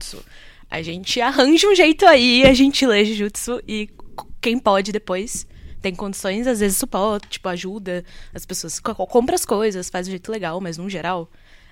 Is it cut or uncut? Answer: uncut